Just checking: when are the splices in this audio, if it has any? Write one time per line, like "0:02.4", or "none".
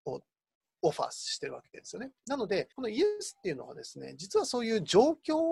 0:02.2
0:02.7